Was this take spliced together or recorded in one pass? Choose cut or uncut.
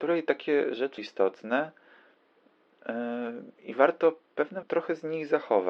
cut